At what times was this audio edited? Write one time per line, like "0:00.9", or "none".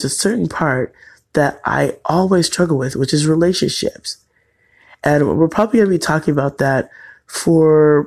none